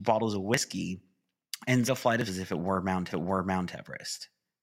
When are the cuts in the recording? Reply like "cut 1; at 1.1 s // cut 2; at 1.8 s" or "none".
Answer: cut 1; at 1.8 s // cut 2; at 2.3 s // cut 3; at 3.1 s